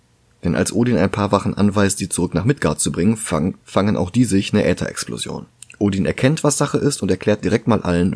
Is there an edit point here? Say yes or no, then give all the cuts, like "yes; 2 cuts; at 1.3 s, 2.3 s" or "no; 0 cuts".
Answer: yes; 2 cuts; at 3.6 s, 5.6 s